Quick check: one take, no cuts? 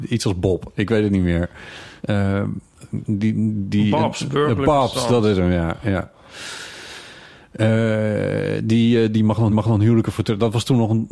no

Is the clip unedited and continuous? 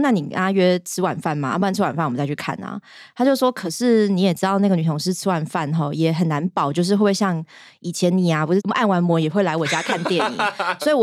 yes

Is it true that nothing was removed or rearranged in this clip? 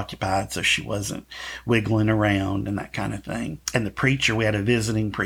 no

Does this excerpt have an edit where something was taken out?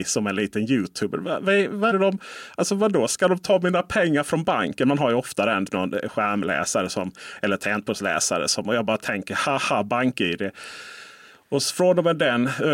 yes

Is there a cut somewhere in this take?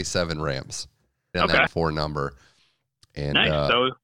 yes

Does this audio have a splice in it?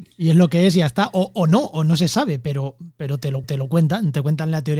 yes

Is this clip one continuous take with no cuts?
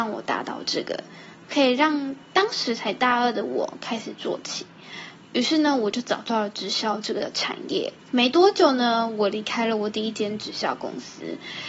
no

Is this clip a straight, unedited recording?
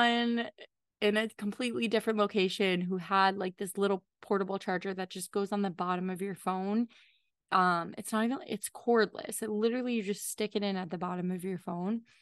yes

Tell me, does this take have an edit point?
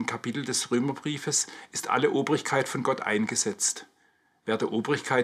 no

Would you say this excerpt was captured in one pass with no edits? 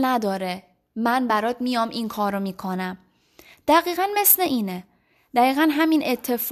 yes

